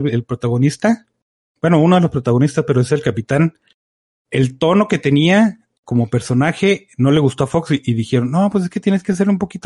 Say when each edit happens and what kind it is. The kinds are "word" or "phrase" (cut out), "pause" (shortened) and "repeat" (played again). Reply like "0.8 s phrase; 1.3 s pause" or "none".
none

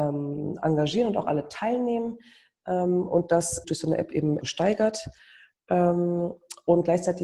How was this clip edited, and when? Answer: 3.6 s word; 4.4 s word

